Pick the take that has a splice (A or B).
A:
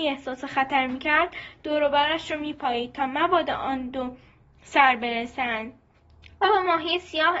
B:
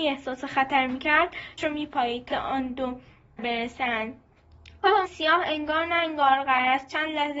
B